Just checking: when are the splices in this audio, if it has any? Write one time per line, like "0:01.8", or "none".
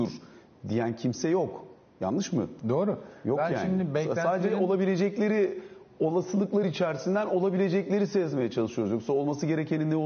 none